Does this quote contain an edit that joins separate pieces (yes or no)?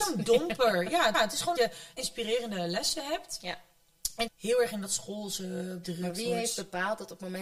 yes